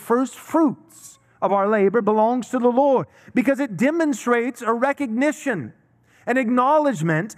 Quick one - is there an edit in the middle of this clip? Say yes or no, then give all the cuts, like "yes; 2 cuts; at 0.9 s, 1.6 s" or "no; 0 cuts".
no; 0 cuts